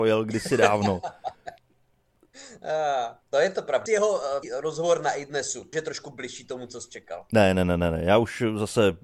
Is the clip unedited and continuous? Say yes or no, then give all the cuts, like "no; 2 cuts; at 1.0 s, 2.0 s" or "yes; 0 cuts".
no; 5 cuts; at 1.6 s, 3.2 s, 3.9 s, 4.4 s, 5.7 s